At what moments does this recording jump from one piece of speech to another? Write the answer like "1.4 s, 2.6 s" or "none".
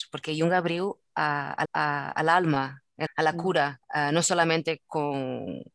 1.6 s, 3.1 s, 3.8 s

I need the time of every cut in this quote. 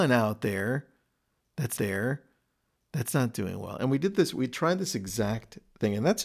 1.8 s

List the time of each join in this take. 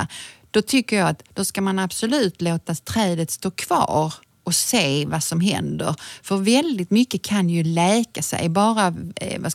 none

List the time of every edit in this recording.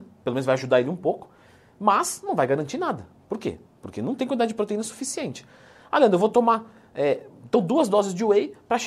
none

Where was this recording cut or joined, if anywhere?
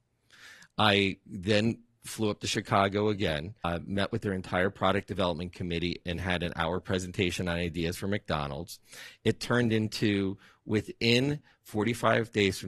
none

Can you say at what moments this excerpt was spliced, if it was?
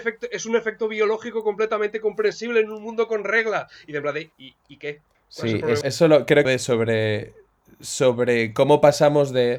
4.3 s, 5.1 s, 5.8 s, 6.4 s

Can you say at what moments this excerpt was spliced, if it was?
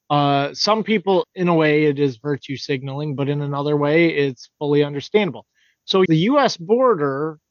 1.2 s, 6.1 s

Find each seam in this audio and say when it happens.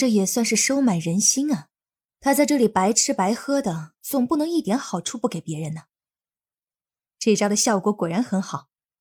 3.9 s

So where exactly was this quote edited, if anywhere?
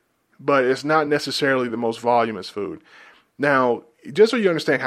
none

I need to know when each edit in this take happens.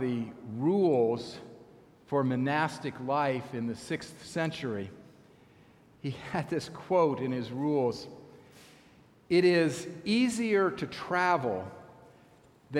none

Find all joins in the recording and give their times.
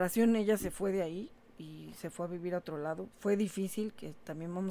none

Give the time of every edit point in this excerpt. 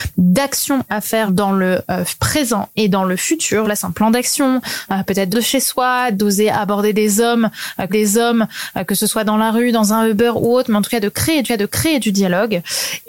1.3 s, 3.6 s, 5.3 s, 7.9 s, 11.4 s

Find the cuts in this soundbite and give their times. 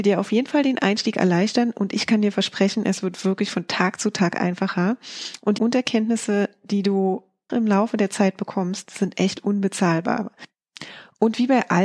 5.6 s, 7.5 s

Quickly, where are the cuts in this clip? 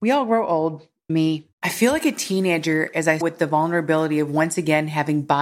1.1 s, 1.5 s, 3.2 s

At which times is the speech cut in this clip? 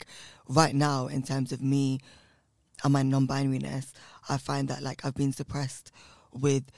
5.3 s

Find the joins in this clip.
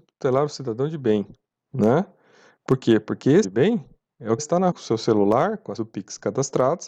3.4 s, 4.4 s, 4.7 s, 5.8 s

